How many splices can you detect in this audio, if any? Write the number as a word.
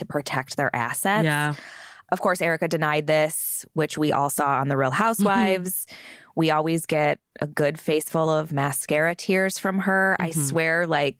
zero